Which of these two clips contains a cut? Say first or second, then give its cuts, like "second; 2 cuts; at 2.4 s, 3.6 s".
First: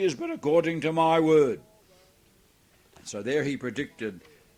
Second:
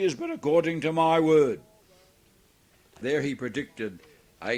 second; 1 cut; at 3.0 s